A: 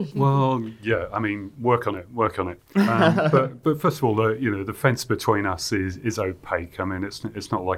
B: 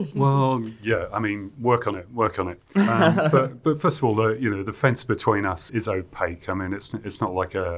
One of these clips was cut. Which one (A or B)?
B